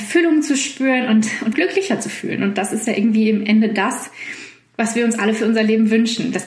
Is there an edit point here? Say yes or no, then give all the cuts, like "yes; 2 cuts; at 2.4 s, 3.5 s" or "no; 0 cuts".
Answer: yes; 1 cut; at 1.5 s